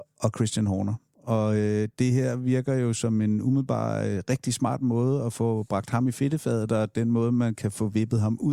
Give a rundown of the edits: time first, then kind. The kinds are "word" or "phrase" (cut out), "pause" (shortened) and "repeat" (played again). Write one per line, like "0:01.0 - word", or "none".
none